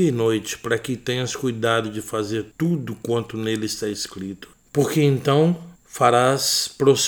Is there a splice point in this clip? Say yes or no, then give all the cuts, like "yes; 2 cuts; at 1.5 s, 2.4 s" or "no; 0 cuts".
yes; 2 cuts; at 2.5 s, 5.8 s